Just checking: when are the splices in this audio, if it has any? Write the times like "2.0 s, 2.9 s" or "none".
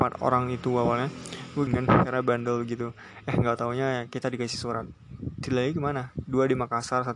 1.7 s